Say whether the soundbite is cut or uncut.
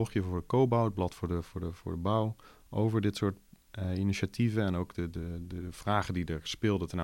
uncut